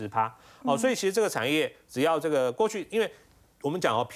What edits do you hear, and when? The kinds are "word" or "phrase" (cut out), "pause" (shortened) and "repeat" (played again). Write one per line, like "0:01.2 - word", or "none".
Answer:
none